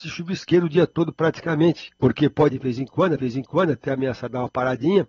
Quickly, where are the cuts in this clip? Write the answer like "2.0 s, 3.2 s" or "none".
2.0 s, 2.5 s, 3.2 s